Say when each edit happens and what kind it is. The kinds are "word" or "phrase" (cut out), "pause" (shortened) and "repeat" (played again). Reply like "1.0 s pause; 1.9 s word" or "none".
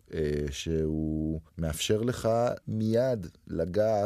1.5 s pause; 2.6 s pause